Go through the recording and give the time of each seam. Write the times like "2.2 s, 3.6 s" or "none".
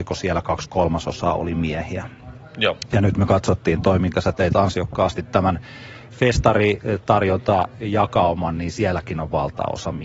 none

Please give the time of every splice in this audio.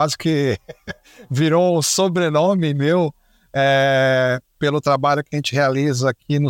none

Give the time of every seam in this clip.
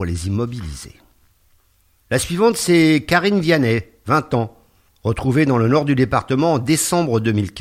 1.6 s, 4.9 s

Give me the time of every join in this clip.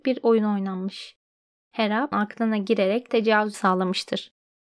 2.1 s, 3.1 s, 3.5 s

